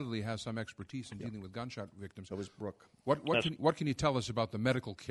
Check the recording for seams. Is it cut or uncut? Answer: uncut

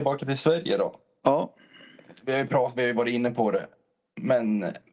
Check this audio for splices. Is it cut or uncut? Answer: uncut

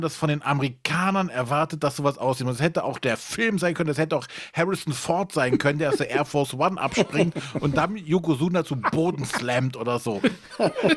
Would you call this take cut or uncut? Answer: uncut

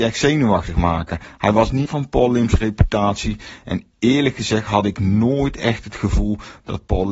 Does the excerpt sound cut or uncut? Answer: cut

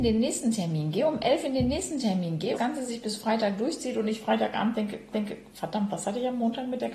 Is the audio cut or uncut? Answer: cut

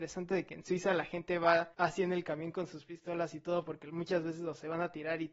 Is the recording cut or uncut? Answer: cut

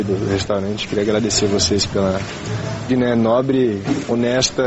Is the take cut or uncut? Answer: cut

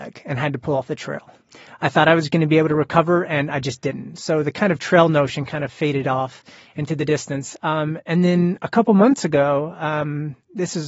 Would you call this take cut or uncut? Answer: uncut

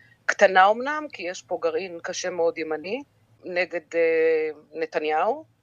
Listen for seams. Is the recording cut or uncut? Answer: uncut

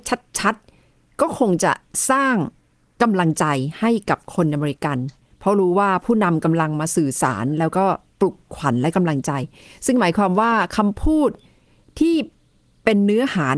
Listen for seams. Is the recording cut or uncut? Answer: uncut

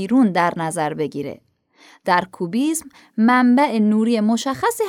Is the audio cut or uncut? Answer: uncut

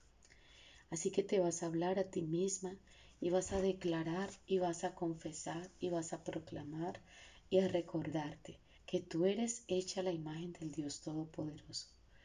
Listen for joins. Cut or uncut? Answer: cut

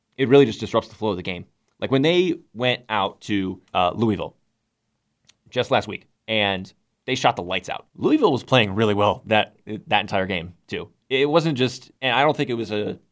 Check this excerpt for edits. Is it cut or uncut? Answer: cut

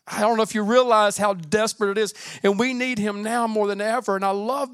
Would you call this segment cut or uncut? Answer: uncut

